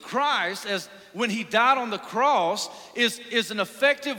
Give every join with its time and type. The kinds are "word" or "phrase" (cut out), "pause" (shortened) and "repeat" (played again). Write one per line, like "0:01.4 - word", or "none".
none

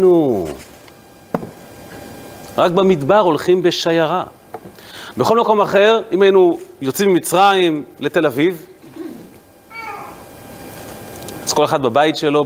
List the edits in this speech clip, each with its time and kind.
none

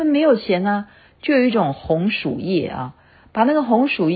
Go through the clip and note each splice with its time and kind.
none

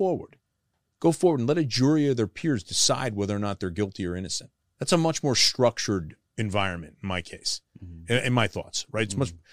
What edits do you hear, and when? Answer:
0:04.6 - pause
0:06.2 - pause

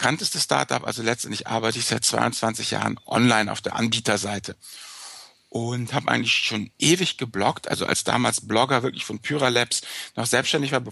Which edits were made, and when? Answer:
none

